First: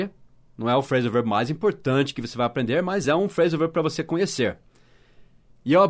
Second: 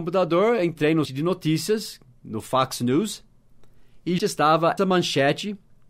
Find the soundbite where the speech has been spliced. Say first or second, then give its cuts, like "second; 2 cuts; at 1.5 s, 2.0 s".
second; 3 cuts; at 1.1 s, 4.2 s, 4.8 s